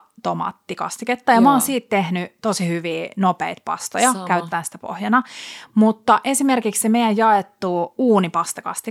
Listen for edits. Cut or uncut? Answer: uncut